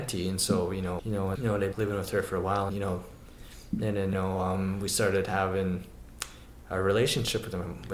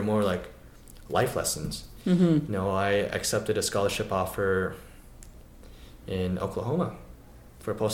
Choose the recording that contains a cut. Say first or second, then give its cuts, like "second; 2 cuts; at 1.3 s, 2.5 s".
first; 5 cuts; at 1.0 s, 1.4 s, 1.7 s, 2.7 s, 4.1 s